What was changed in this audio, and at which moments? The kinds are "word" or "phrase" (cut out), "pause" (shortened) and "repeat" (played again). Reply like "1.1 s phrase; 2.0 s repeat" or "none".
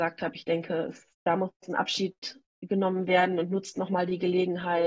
1.1 s pause